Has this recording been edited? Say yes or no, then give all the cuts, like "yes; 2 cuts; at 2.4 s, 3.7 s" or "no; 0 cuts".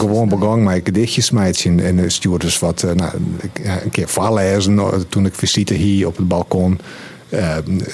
no; 0 cuts